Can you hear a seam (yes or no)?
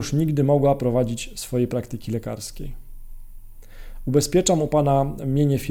no